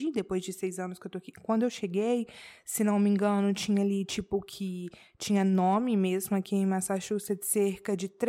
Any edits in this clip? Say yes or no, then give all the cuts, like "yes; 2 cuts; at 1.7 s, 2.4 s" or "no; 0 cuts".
no; 0 cuts